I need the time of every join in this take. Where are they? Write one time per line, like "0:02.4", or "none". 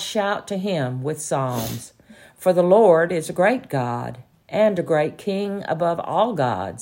none